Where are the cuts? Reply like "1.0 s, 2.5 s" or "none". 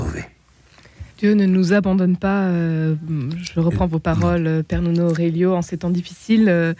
1.1 s